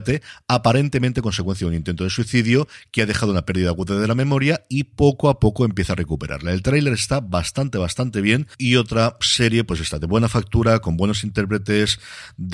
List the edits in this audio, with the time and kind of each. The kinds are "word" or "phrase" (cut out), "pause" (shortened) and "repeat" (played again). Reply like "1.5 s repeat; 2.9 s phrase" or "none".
none